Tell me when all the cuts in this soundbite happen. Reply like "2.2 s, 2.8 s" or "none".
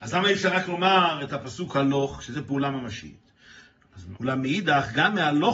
2.3 s, 4.2 s